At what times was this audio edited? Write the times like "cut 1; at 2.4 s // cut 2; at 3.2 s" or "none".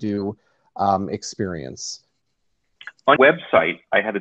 cut 1; at 3.2 s